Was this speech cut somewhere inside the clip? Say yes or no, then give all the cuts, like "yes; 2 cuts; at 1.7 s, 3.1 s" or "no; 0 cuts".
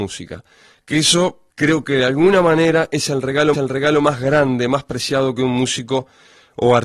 yes; 2 cuts; at 1.5 s, 3.5 s